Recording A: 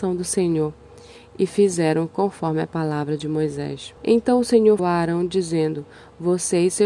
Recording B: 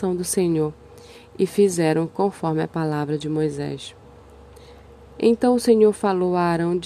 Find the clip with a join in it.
A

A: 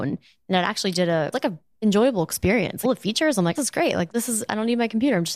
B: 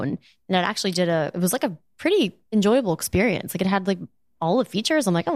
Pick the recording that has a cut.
A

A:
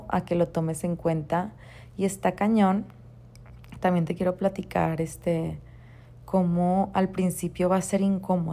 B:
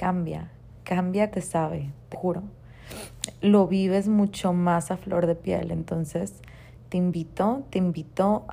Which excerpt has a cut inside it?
B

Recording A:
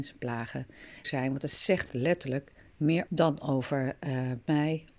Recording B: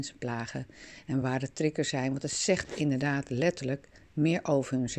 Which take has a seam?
A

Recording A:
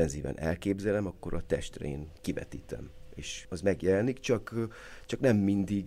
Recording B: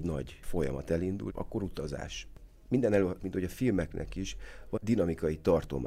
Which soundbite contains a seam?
B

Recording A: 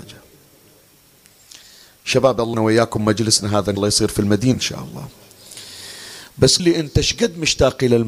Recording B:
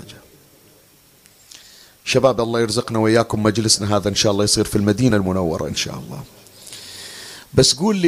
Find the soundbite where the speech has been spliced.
A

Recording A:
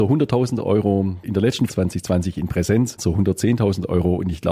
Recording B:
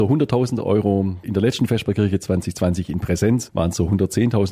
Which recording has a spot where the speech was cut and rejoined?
A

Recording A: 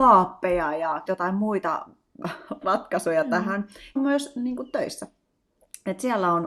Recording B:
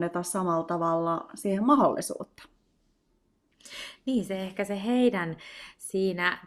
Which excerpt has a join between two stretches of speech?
A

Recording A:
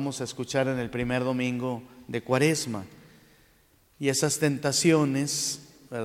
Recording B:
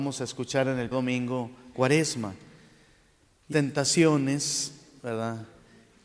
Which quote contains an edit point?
B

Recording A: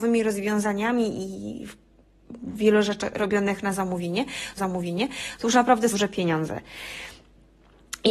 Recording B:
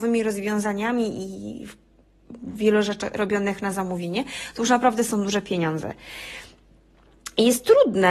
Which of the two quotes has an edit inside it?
A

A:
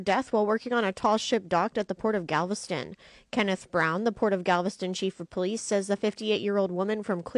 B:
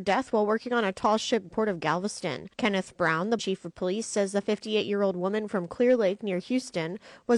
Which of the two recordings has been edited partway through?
B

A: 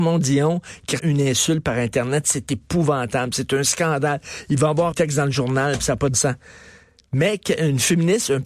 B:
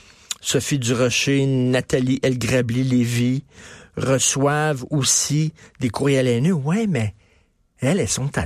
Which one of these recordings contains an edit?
A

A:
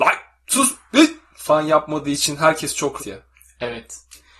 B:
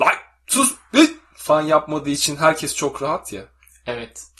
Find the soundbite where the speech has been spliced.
A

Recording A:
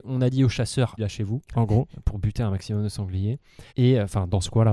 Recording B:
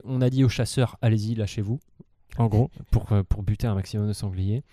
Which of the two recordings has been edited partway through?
A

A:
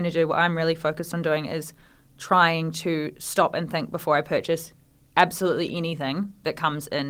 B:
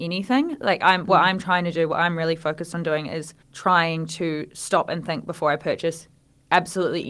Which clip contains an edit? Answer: B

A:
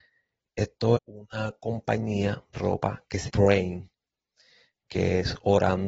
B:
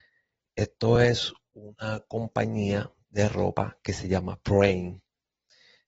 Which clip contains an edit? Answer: A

